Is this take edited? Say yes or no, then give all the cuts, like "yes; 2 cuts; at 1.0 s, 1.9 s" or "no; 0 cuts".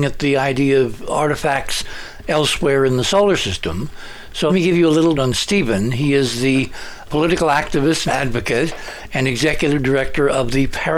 yes; 4 cuts; at 4.5 s, 5.2 s, 7.1 s, 8.1 s